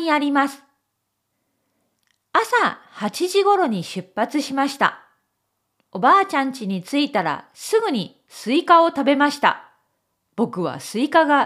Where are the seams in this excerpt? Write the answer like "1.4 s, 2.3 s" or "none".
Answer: none